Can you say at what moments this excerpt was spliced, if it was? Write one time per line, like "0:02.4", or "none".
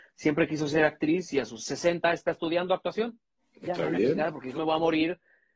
0:03.4
0:04.5